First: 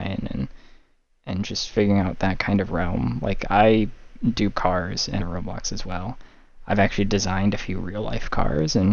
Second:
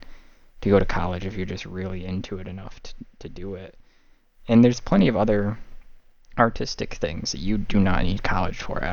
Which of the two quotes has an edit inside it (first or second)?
first